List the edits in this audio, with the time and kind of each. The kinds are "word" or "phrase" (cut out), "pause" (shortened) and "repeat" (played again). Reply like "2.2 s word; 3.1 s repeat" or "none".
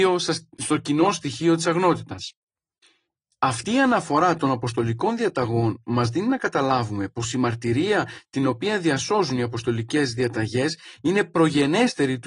none